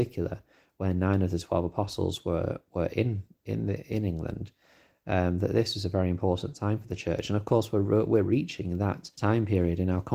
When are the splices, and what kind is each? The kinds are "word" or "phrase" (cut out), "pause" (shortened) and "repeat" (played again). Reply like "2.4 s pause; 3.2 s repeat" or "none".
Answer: 2.7 s pause; 3.3 s pause; 9.1 s pause